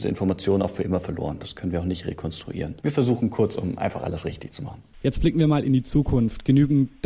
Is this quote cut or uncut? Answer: cut